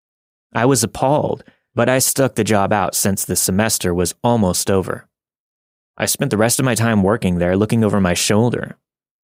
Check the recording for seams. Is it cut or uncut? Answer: uncut